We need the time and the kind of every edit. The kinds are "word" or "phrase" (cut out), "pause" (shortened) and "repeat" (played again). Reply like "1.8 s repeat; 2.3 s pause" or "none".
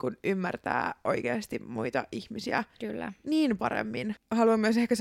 2.7 s pause; 3.6 s word

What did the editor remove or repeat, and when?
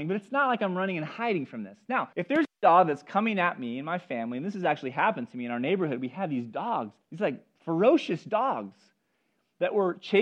2.1 s pause; 7.0 s pause

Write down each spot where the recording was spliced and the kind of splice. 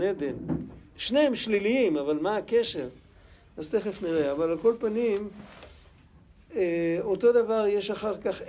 none

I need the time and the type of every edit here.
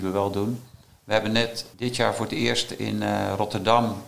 1.7 s pause

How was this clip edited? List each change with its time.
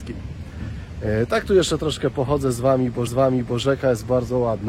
3.1 s repeat

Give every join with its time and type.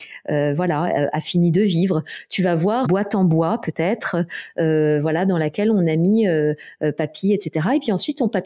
2.8 s word

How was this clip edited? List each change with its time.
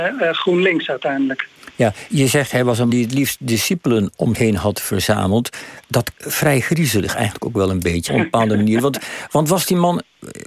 2.1 s word; 2.9 s word; 4.3 s word; 6.1 s word; 8.1 s word

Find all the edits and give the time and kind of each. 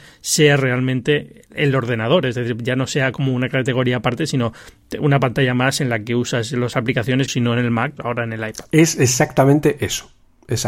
7.3 s phrase; 8.0 s word

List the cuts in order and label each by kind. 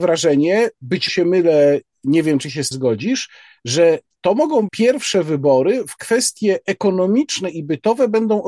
1.1 s word; 2.7 s word; 4.7 s word; 6.0 s word

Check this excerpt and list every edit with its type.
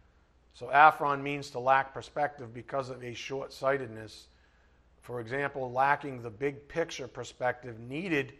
none

